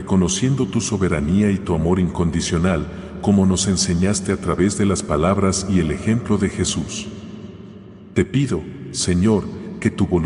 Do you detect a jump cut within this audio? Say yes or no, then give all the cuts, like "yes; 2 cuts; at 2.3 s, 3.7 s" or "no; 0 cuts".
no; 0 cuts